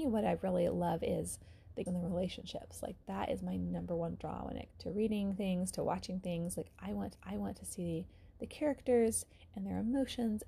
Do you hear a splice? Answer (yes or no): yes